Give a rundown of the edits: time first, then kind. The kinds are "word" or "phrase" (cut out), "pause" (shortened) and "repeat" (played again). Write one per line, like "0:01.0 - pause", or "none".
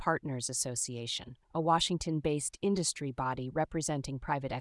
0:01.4 - pause